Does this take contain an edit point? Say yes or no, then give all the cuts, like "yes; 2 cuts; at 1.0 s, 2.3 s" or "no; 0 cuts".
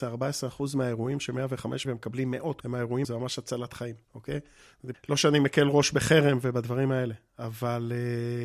yes; 5 cuts; at 1.8 s, 2.6 s, 3.0 s, 4.0 s, 4.9 s